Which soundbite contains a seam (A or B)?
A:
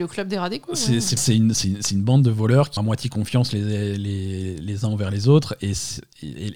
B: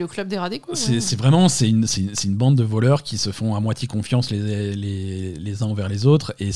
A